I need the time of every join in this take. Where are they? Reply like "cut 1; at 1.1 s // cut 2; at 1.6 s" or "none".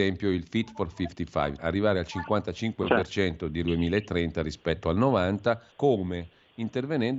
cut 1; at 1.6 s // cut 2; at 3.6 s // cut 3; at 5.7 s